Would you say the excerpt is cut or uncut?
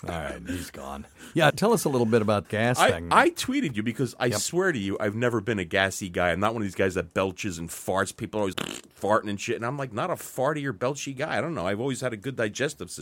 cut